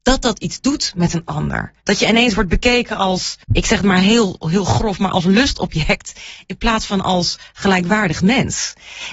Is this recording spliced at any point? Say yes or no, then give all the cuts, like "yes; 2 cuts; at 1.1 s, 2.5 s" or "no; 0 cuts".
yes; 2 cuts; at 1.8 s, 3.4 s